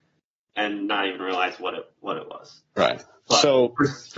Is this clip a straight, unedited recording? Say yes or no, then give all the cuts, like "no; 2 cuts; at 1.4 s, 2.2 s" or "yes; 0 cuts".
yes; 0 cuts